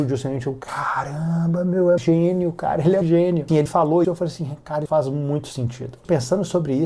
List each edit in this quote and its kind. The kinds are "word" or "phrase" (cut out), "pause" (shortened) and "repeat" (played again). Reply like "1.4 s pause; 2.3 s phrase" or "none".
2.0 s word; 3.0 s word; 3.7 s word; 4.0 s word; 4.9 s word